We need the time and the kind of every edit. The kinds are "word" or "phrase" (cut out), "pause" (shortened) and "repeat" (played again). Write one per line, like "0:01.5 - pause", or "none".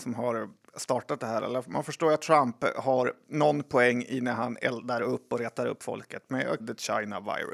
0:06.6 - word